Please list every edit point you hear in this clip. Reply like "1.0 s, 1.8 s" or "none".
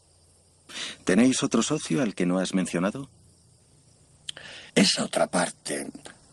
4.7 s